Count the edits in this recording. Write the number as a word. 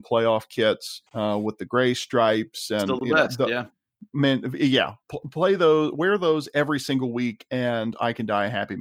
one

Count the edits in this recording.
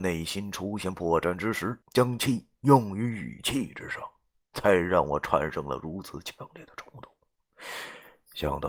one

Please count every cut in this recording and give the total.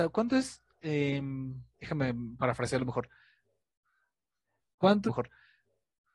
one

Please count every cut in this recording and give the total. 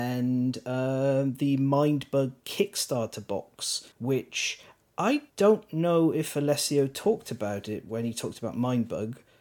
two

